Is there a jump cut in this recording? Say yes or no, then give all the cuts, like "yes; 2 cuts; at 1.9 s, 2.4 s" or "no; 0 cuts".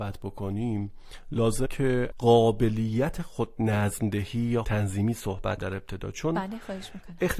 yes; 4 cuts; at 1.7 s, 2.1 s, 4.6 s, 5.6 s